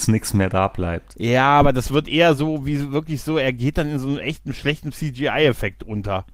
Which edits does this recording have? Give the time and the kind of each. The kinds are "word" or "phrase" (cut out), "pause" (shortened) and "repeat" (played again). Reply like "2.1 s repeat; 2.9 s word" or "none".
none